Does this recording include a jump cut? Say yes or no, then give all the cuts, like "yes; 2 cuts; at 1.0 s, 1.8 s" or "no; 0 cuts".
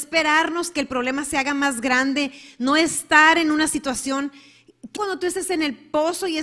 yes; 1 cut; at 5.0 s